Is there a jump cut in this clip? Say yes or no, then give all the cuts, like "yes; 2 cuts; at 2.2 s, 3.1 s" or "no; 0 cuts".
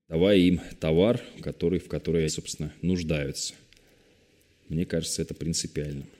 yes; 2 cuts; at 1.3 s, 2.3 s